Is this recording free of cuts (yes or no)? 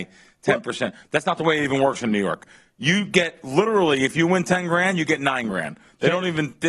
yes